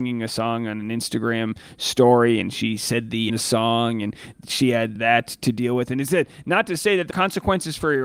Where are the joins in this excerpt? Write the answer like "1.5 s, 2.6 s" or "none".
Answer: 3.3 s, 5.0 s, 7.1 s